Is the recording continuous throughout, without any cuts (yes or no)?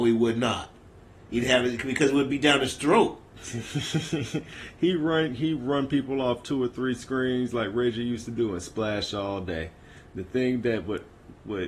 no